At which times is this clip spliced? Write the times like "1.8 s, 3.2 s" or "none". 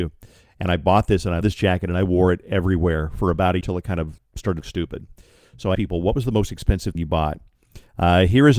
1.4 s, 3.6 s, 4.2 s, 4.6 s, 5.8 s, 7.0 s

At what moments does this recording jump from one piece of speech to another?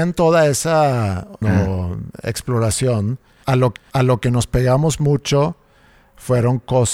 1.4 s, 3.8 s

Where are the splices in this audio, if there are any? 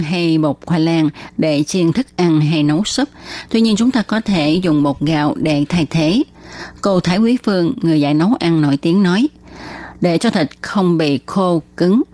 none

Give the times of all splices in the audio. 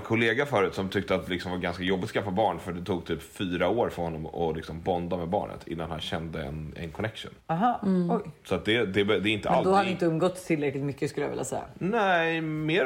7.4 s

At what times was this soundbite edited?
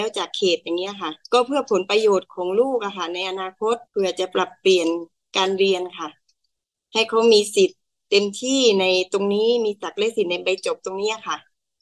1.2 s, 3.9 s

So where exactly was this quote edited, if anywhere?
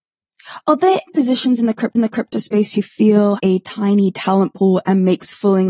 1.1 s, 1.9 s, 3.4 s

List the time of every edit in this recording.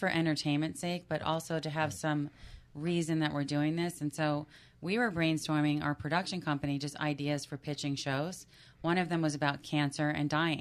none

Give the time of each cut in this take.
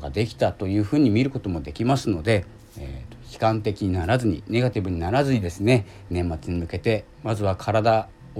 2.6 s

